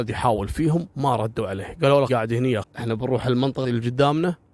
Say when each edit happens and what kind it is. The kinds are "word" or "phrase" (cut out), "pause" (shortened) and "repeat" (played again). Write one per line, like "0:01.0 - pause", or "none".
0:00.9 - pause
0:02.1 - word
0:02.6 - word
0:03.6 - word